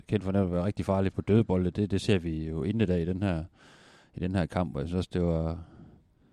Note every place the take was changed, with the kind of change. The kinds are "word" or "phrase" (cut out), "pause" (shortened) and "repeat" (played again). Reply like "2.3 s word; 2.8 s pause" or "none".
1.1 s word